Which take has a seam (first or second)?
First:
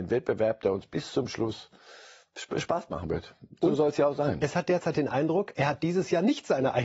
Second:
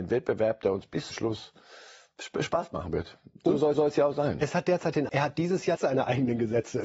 second